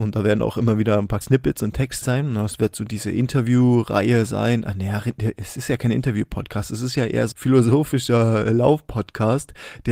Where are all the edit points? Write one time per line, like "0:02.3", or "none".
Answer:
0:01.2
0:02.0
0:07.3

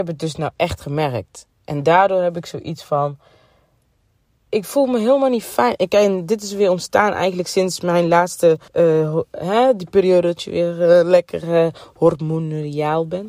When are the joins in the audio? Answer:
0:08.7

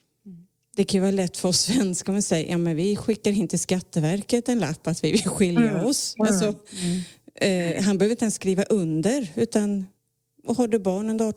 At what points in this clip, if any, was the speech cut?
none

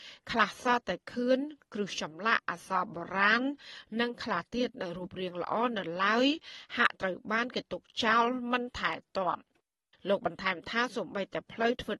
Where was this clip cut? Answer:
none

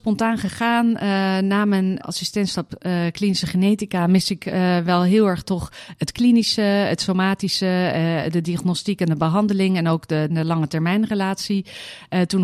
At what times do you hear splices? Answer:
0:02.0
0:10.3

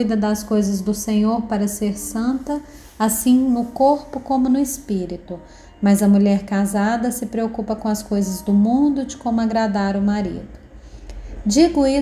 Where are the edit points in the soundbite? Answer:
none

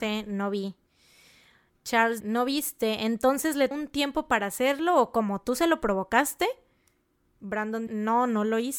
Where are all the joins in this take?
0:02.2
0:03.7
0:07.9

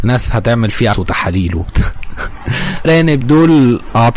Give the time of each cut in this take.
0:00.9
0:02.8
0:03.2

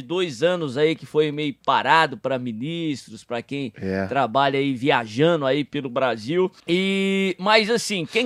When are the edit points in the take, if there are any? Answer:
0:06.6

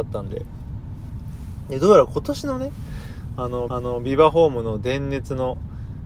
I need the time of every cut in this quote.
0:03.7

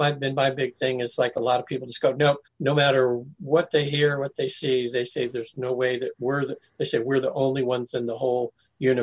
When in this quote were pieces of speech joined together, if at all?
0:02.5

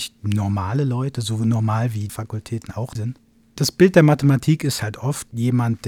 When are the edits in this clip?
0:02.1
0:03.0

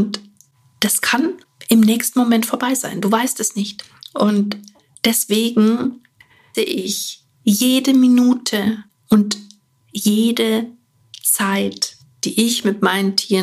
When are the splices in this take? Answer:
0:06.5

